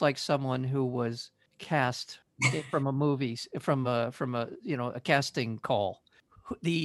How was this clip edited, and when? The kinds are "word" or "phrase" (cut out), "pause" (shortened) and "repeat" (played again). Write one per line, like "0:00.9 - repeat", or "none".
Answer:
none